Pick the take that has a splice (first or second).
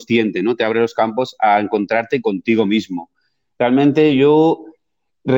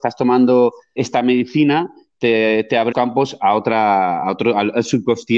second